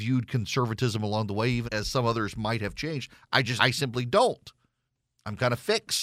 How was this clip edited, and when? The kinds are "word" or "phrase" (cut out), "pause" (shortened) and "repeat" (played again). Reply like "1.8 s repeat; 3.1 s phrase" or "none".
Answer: 1.6 s word; 3.6 s word; 4.9 s pause